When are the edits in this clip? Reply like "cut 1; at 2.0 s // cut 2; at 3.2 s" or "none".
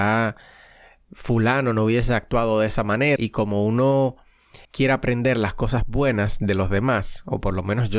cut 1; at 3.2 s // cut 2; at 4.6 s